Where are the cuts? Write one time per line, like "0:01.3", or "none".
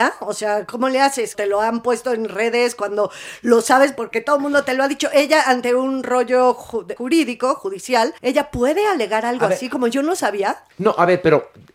0:01.3
0:07.0
0:08.2
0:10.7